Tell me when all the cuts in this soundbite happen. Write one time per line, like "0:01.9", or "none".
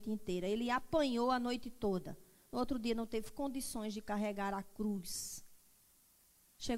none